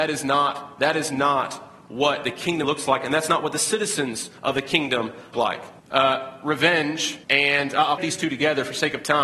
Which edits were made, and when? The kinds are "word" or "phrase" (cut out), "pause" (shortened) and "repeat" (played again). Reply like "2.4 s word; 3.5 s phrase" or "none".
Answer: 2.6 s phrase; 4.4 s pause; 5.3 s word; 5.8 s pause; 7.2 s pause; 8.0 s word